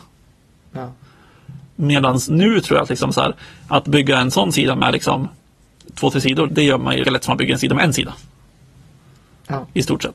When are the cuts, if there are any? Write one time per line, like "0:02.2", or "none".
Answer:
0:06.5
0:07.0

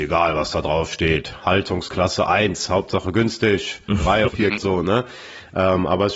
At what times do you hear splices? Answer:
0:04.3
0:04.6

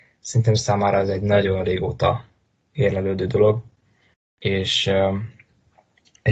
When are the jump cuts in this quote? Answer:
none

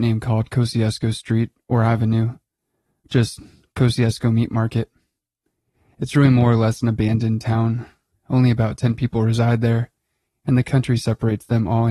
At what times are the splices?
none

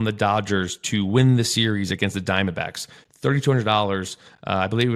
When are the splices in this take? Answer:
none

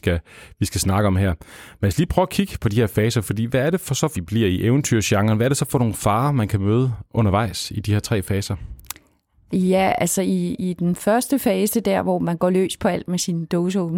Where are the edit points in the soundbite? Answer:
0:04.1

